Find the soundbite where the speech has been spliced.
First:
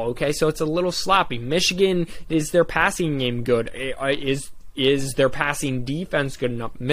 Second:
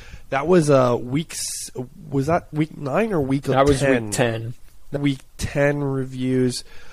second; 1 cut; at 5.0 s

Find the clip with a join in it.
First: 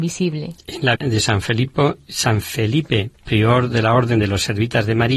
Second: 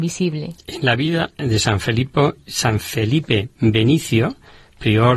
first; 2 cuts; at 1.0 s, 3.1 s

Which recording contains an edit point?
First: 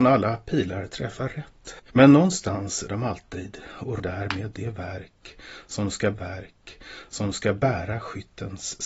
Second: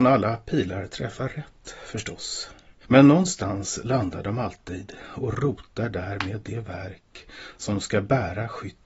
first; 4 cuts; at 1.8 s, 2.9 s, 4.0 s, 6.1 s

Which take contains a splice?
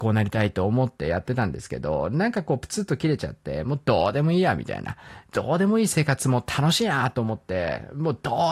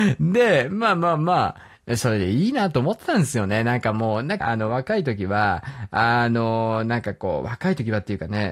second; 1 cut; at 4.4 s

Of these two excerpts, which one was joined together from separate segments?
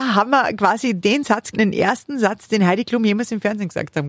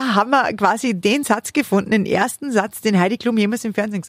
first; 1 cut; at 1.5 s

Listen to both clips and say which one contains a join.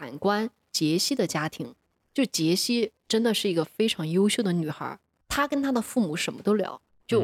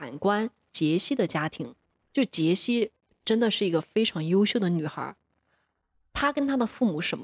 first; 2 cuts; at 3.0 s, 5.2 s

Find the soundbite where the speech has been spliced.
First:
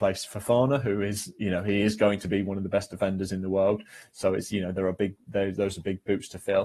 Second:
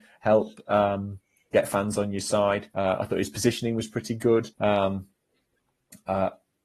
second; 2 cuts; at 2.7 s, 4.5 s

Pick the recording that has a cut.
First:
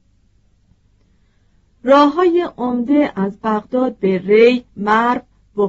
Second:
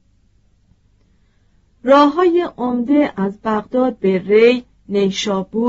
first; 1 cut; at 4.7 s

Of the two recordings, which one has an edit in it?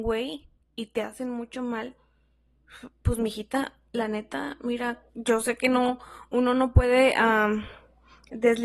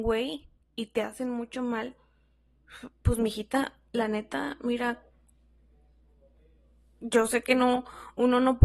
first; 1 cut; at 5.1 s

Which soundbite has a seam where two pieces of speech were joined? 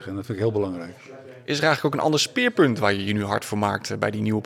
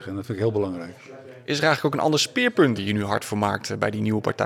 second; 1 cut; at 2.8 s

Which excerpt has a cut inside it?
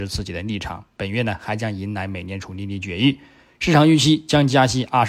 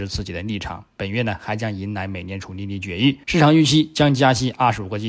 second; 1 cut; at 3.2 s

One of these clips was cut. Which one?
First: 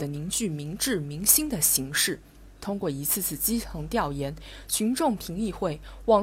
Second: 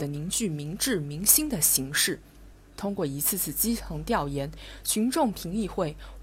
first; 1 cut; at 2.6 s

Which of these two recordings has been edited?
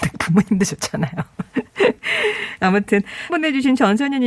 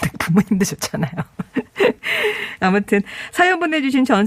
first; 1 cut; at 3.3 s

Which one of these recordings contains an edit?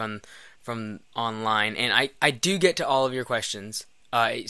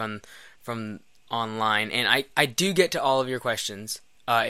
first; 1 cut; at 1.0 s

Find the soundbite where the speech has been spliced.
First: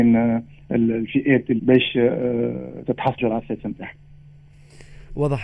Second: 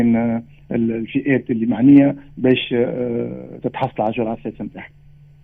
first; 2 cuts; at 1.6 s, 3.2 s

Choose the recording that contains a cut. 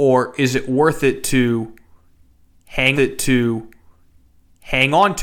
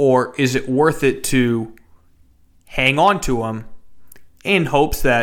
first; 1 cut; at 2.9 s

